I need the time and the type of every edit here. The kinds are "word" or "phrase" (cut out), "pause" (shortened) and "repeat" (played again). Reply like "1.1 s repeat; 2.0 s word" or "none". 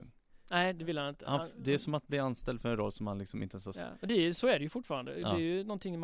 3.7 s word